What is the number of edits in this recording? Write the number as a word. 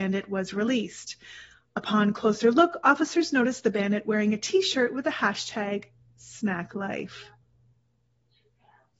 zero